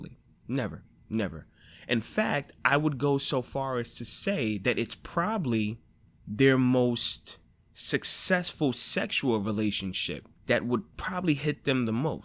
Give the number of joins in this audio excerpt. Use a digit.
4